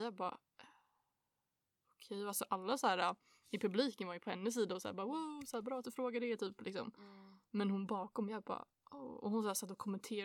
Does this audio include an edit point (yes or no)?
no